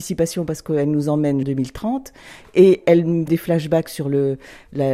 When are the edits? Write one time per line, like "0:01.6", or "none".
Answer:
0:01.4
0:03.3

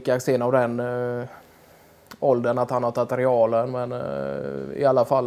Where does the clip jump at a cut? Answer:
none

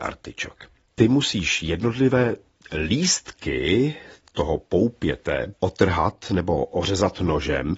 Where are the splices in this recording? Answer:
none

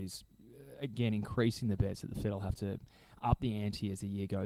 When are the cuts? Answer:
none

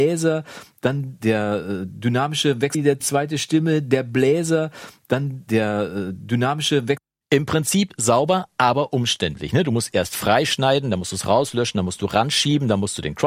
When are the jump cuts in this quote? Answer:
0:03.0

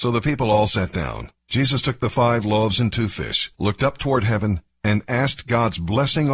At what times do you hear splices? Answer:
0:01.4
0:03.5

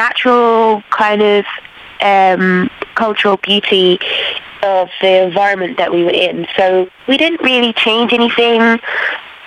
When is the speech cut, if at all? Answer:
0:07.0

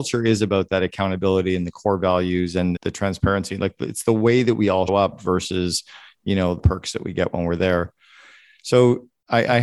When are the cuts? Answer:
0:02.8
0:04.9
0:06.6

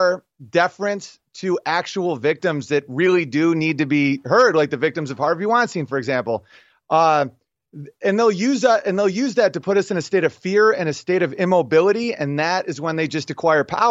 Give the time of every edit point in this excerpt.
none

